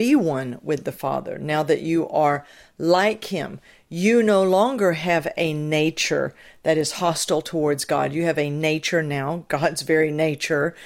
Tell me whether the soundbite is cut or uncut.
uncut